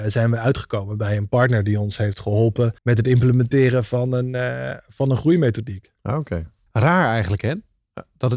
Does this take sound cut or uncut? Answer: cut